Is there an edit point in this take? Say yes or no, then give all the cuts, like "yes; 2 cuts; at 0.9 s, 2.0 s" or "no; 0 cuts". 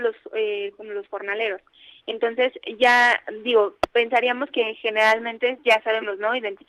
no; 0 cuts